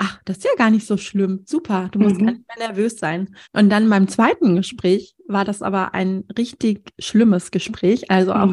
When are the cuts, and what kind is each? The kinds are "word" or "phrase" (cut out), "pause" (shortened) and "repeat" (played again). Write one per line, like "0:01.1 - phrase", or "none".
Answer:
0:03.4 - pause